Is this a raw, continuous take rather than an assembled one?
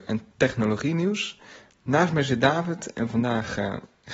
yes; 0 cuts

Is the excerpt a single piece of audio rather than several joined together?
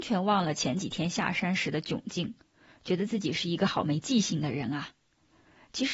yes; 0 cuts

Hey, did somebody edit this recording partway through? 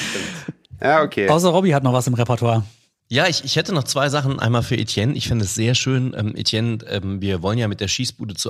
no; 0 cuts

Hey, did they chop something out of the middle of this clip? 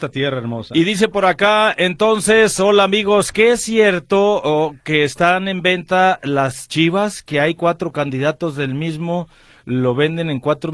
no; 0 cuts

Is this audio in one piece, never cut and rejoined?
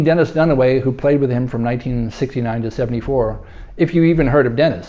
yes; 0 cuts

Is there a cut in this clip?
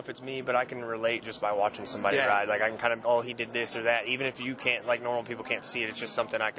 yes; 1 cut; at 3.0 s

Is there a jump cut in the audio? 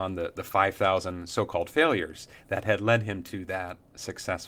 no; 0 cuts

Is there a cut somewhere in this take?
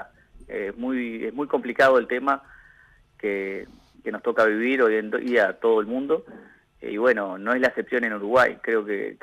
no; 0 cuts

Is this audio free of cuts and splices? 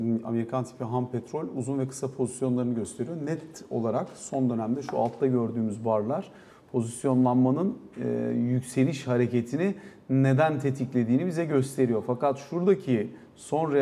yes; 0 cuts

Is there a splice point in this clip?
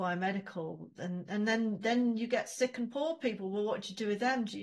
no; 0 cuts

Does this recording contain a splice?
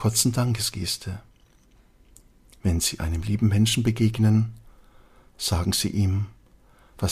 no; 0 cuts

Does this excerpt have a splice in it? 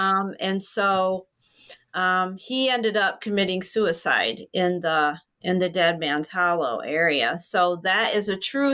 no; 0 cuts

